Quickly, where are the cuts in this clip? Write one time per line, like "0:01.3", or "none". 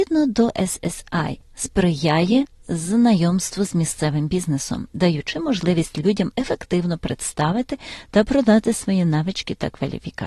none

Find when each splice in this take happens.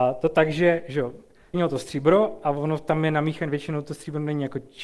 0:01.5

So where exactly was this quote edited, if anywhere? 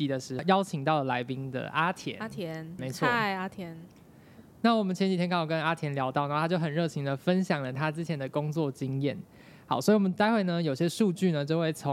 0:02.8

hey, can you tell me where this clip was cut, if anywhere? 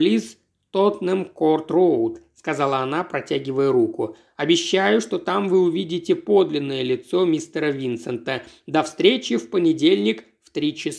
none

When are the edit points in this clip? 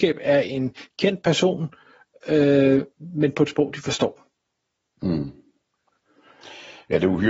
none

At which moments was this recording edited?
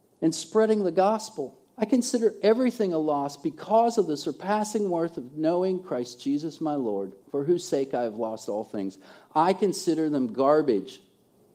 0:01.7
0:07.2

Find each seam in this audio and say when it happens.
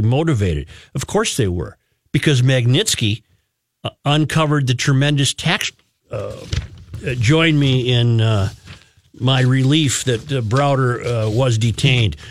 none

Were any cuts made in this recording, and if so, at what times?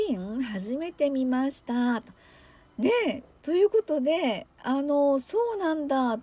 none

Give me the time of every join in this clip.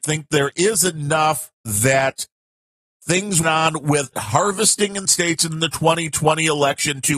0:01.5
0:03.4
0:04.1
0:05.1

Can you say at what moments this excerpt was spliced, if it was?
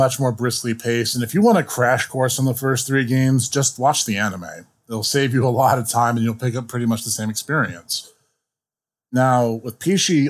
none

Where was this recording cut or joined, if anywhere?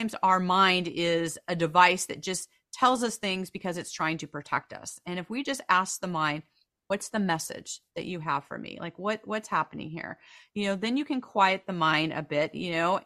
none

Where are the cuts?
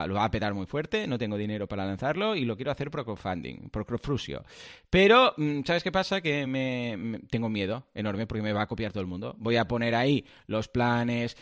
none

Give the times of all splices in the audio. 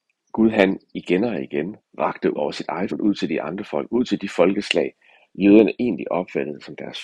0:02.4
0:02.9
0:05.3

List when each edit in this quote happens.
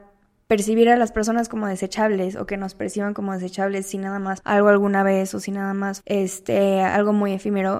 0:04.4
0:06.0

